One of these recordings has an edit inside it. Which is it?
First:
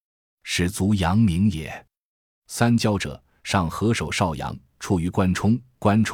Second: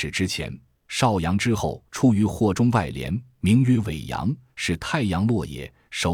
second; 1 cut; at 1.9 s

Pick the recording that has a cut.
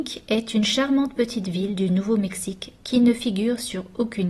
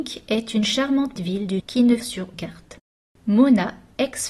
second; 4 cuts; at 1.2 s, 1.6 s, 2.0 s, 2.3 s

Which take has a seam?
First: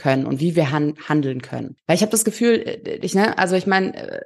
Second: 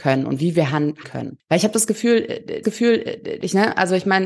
second; 2 cuts; at 1.0 s, 2.6 s

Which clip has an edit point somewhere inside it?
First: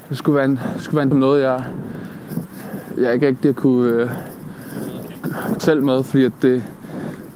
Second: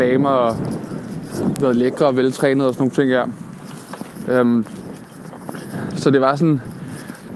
first; 2 cuts; at 1.1 s, 5.6 s

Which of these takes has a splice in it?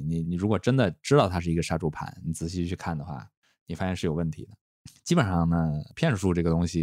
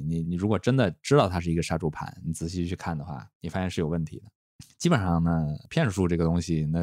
second; 1 cut; at 3.3 s

